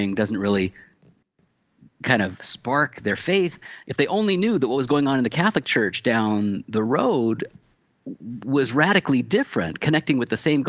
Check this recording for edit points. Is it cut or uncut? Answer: uncut